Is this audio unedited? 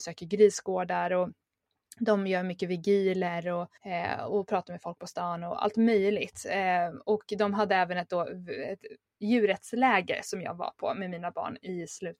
no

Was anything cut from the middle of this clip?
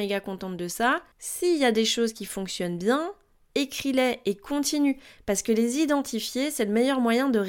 no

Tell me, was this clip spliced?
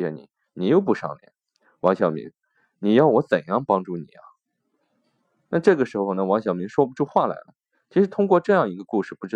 no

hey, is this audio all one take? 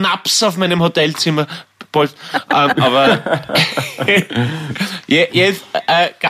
no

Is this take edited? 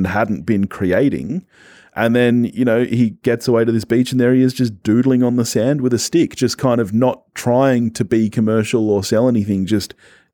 no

